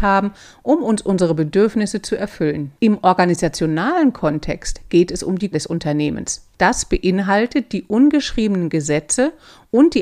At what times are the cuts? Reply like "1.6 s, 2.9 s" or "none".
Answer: 2.8 s, 5.5 s, 6.5 s